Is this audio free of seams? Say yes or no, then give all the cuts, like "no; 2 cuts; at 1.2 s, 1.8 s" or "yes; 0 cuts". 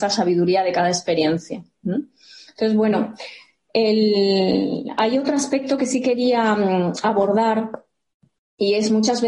yes; 0 cuts